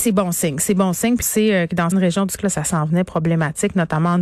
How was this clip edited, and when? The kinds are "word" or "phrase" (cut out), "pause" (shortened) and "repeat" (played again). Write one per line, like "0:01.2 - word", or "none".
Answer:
0:01.2 - word
0:01.9 - word
0:02.4 - word